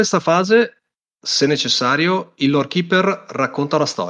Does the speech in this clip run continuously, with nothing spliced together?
yes; 0 cuts

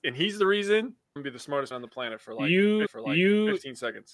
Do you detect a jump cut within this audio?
yes; 3 cuts; at 1.2 s, 1.7 s, 2.9 s

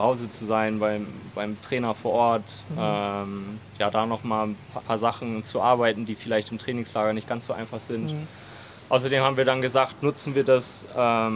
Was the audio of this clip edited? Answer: yes; 1 cut; at 4.8 s

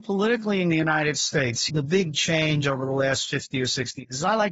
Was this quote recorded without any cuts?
yes; 0 cuts

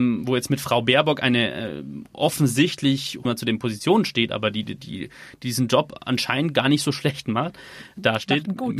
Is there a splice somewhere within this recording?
yes; 1 cut; at 3.2 s

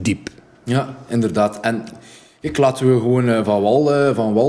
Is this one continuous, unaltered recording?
yes; 0 cuts

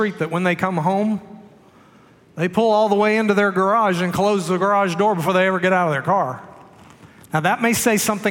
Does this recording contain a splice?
no; 0 cuts

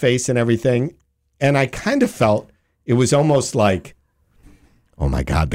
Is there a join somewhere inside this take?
no; 0 cuts

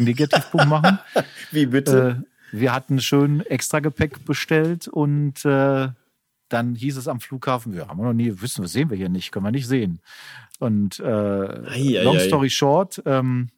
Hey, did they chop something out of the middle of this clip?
no; 0 cuts

